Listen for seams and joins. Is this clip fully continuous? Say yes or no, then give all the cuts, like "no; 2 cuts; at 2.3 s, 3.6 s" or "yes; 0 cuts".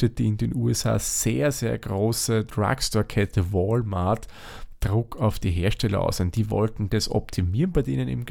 yes; 0 cuts